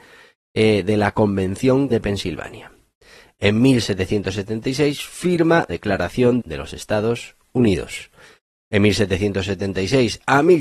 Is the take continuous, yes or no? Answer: no